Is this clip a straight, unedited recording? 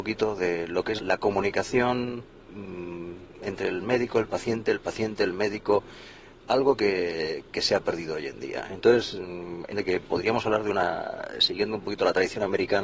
no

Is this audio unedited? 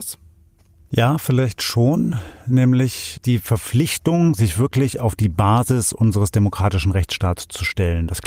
yes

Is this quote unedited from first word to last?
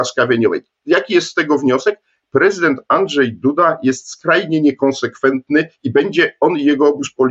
yes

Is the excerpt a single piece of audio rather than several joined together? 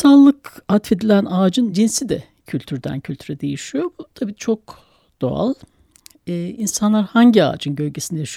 yes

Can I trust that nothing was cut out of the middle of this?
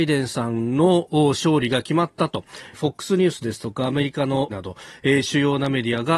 no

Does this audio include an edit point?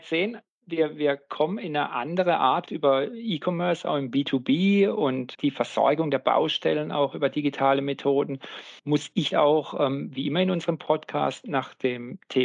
yes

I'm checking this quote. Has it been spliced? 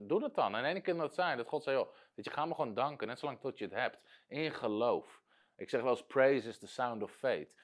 no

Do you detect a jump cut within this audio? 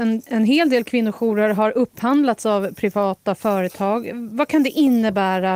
no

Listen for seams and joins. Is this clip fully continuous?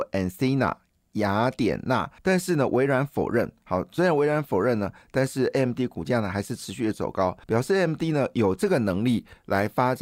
no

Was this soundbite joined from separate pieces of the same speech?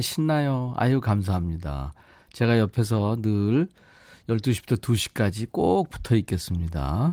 no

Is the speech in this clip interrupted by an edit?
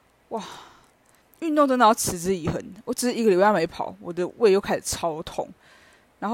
yes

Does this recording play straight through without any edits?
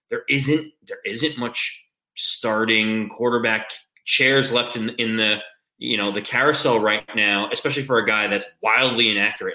yes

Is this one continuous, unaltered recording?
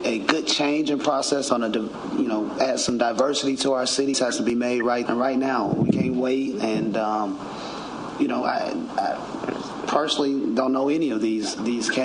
no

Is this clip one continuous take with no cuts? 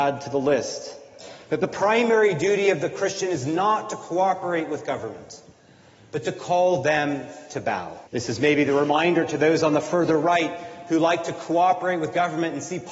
no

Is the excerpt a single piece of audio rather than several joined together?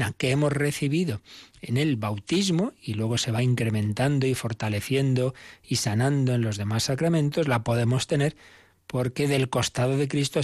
yes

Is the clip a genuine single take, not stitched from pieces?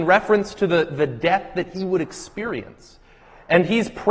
yes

